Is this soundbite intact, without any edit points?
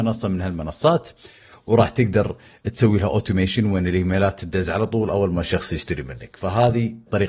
yes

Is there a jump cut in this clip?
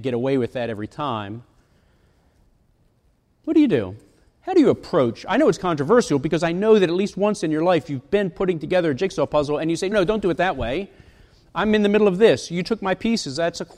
yes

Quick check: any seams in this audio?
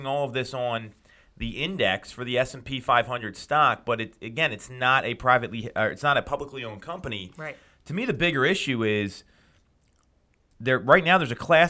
no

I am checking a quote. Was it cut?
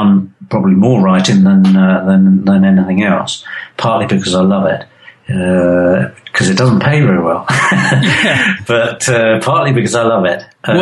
no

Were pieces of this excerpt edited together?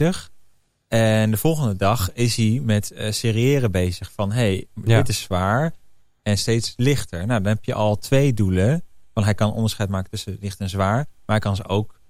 no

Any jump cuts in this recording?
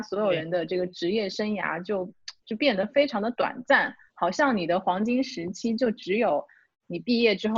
yes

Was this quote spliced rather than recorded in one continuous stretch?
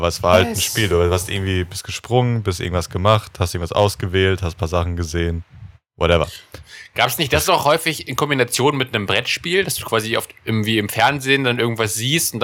no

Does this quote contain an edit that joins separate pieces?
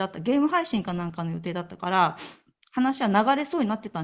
no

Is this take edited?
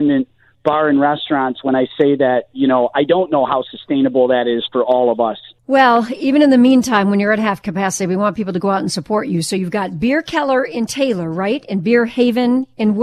no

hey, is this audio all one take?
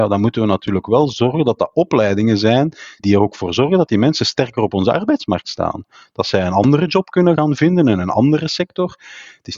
no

